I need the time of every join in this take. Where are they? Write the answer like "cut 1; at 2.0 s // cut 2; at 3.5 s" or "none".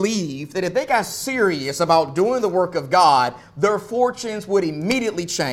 none